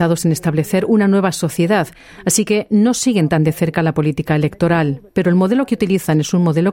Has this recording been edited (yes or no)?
no